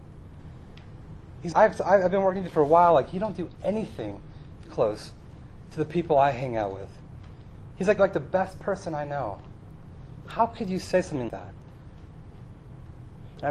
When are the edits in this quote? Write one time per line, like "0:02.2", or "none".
0:01.5
0:04.6
0:08.0
0:11.3